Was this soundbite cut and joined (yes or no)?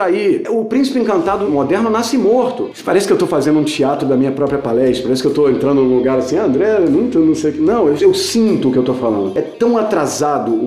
no